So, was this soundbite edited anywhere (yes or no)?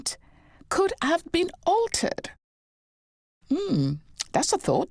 no